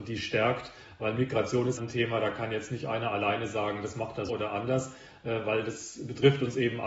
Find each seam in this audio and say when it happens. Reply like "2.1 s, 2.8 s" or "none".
1.8 s, 4.3 s

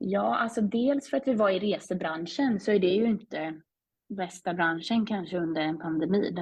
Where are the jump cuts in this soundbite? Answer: none

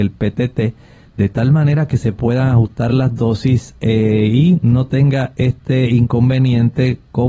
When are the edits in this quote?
none

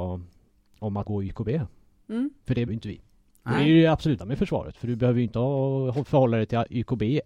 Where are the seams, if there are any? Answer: 1.0 s, 2.7 s, 4.2 s

